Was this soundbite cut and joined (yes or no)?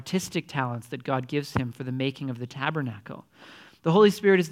no